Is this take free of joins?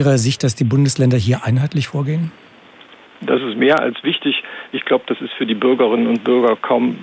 yes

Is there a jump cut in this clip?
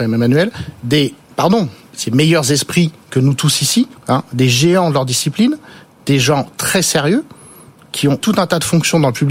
yes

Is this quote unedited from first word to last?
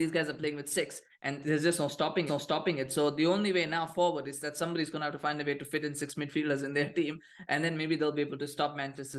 no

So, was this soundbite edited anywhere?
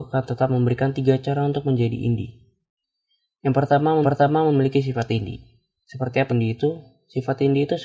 yes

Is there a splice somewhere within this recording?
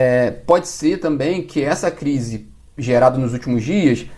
no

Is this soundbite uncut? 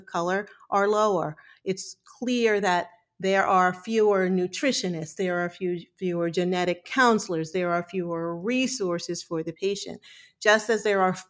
yes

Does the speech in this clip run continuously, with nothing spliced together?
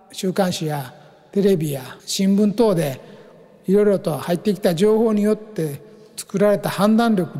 no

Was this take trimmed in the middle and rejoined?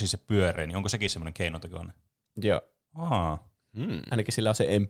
no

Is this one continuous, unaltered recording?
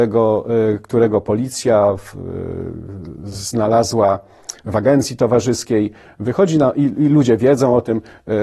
yes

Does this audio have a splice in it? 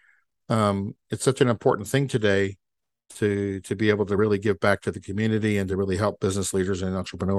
no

